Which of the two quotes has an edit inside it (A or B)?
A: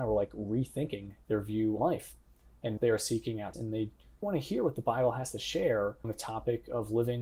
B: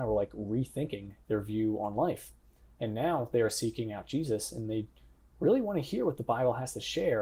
A